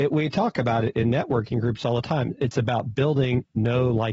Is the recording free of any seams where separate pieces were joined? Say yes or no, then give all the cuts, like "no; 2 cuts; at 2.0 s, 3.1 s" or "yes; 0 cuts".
yes; 0 cuts